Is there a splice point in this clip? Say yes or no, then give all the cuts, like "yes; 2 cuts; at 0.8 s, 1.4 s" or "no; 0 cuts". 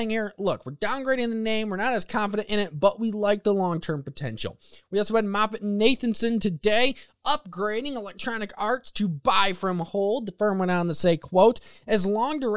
no; 0 cuts